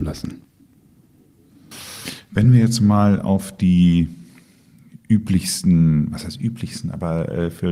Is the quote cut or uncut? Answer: uncut